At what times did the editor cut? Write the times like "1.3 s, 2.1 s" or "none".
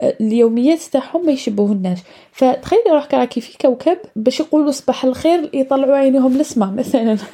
none